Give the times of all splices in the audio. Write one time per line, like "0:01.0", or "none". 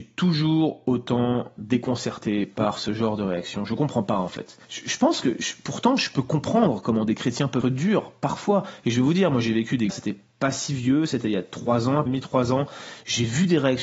0:04.6
0:07.6
0:09.9
0:12.1